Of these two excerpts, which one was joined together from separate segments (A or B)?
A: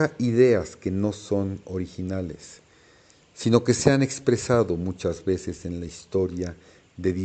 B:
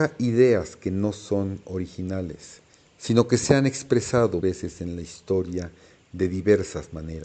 B